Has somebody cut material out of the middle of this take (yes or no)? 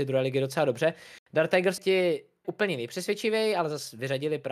yes